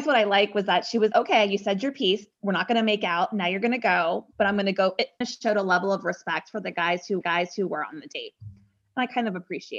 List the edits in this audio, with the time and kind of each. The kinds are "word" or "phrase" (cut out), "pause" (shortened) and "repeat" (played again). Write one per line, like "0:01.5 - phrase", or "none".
0:01.1 - word
0:05.2 - phrase
0:07.2 - repeat